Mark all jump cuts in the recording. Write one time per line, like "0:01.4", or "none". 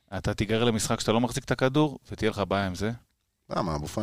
none